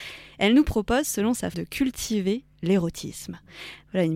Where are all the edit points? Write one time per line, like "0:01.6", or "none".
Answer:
0:01.5